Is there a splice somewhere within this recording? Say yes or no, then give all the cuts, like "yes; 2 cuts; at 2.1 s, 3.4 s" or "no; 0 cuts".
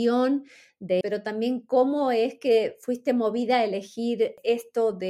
yes; 1 cut; at 1.0 s